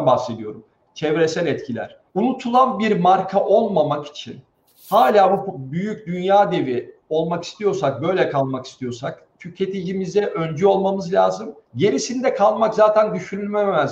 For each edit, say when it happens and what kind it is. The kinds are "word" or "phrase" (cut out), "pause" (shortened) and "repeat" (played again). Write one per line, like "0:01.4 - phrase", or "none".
0:02.1 - pause
0:04.5 - pause
0:11.6 - pause